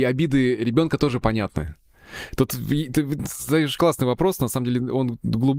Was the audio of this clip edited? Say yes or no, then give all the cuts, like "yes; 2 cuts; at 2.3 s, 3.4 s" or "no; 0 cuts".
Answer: yes; 1 cut; at 3.8 s